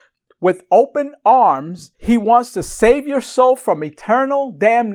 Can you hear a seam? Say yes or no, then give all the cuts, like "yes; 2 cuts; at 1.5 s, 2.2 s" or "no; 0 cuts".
yes; 1 cut; at 1.9 s